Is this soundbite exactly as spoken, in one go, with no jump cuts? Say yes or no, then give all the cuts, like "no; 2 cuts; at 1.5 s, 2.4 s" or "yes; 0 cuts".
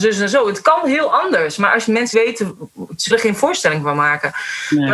no; 2 cuts; at 2.1 s, 3.1 s